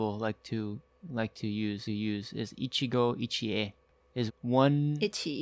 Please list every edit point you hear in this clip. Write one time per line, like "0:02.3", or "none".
0:01.9
0:04.3